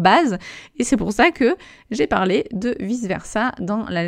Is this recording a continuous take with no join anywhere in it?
yes; 0 cuts

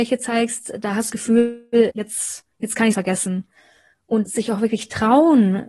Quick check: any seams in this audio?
yes; 5 cuts; at 1.1 s, 1.9 s, 2.5 s, 2.9 s, 4.2 s

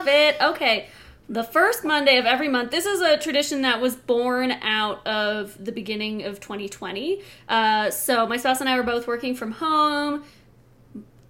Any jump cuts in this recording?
no; 0 cuts

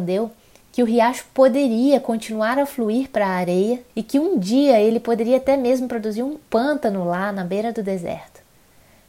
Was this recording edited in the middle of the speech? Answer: yes; 1 cut; at 3.9 s

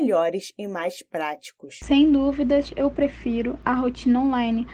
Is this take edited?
no; 0 cuts

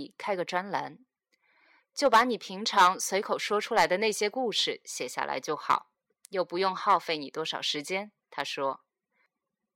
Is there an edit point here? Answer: yes; 1 cut; at 8.2 s

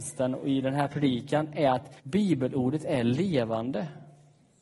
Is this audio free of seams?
no; 1 cut; at 2.0 s

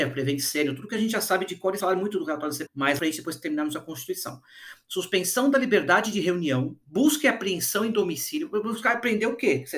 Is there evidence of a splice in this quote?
yes; 4 cuts; at 1.8 s, 2.7 s, 3.0 s, 6.8 s

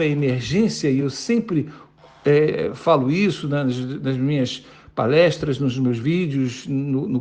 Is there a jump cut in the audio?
no; 0 cuts

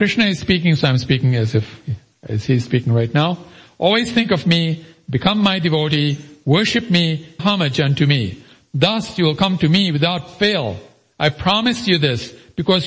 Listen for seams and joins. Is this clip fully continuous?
no; 1 cut; at 7.4 s

